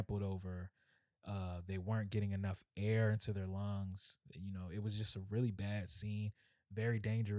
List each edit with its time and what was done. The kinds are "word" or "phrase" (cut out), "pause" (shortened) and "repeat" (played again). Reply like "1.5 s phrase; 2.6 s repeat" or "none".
4.2 s pause